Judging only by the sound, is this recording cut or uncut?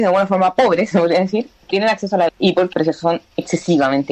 cut